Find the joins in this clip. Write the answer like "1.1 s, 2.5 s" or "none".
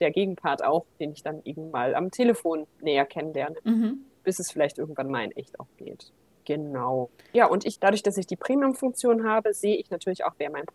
0.9 s, 6.3 s, 7.8 s

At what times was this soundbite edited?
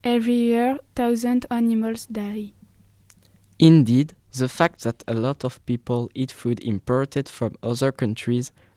1.5 s

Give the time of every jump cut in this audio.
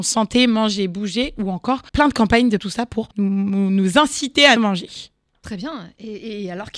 1.9 s, 2.6 s, 3.1 s, 4.6 s, 5.3 s

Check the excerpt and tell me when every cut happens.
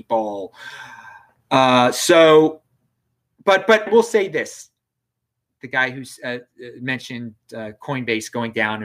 3.9 s

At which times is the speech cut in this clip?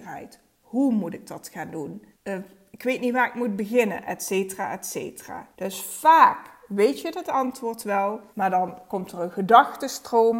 2.1 s, 5.5 s, 8.3 s

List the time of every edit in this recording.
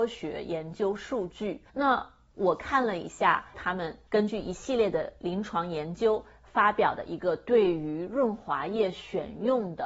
3.5 s

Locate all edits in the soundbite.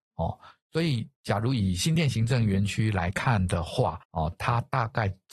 4.0 s

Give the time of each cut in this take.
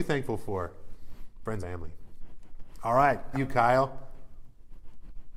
1.6 s, 3.3 s

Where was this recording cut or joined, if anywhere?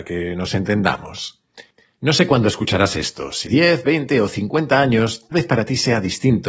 3.5 s, 5.3 s

